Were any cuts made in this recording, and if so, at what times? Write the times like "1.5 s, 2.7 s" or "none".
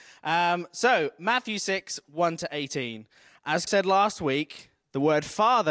3.7 s